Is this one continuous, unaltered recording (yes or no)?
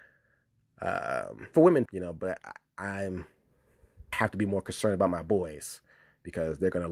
no